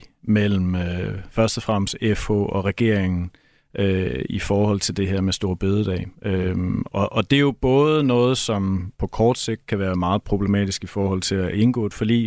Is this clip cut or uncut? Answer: uncut